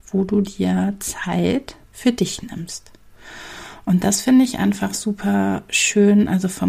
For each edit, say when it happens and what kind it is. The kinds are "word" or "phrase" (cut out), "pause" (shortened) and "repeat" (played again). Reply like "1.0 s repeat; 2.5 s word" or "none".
1.8 s pause